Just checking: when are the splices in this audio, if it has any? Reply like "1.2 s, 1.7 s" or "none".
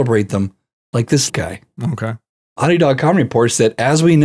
1.3 s